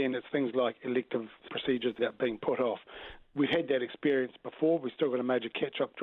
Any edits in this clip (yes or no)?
yes